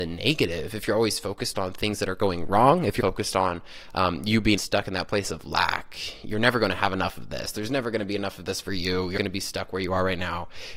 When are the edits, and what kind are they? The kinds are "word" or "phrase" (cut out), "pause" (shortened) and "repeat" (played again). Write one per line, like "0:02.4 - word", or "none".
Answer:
0:03.0 - word
0:04.6 - phrase
0:09.2 - word